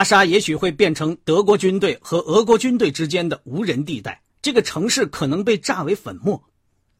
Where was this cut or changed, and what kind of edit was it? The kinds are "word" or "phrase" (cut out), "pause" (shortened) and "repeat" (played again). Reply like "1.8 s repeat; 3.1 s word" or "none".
4.3 s pause